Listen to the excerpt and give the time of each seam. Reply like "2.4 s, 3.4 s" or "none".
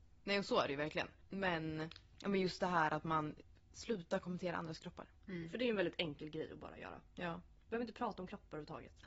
5.2 s